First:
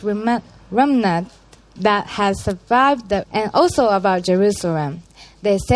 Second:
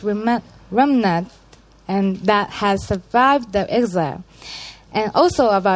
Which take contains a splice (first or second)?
first